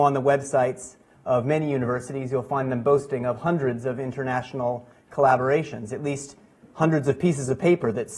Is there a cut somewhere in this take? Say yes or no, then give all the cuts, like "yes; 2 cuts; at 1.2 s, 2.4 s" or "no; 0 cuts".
no; 0 cuts